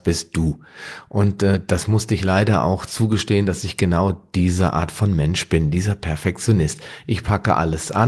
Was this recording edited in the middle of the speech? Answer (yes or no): no